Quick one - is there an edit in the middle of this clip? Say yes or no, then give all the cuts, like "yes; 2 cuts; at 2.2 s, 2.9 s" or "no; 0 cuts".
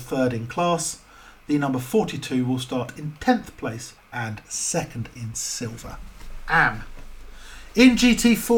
yes; 1 cut; at 4.0 s